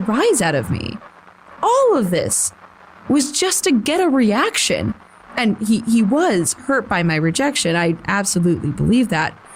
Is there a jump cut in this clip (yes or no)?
no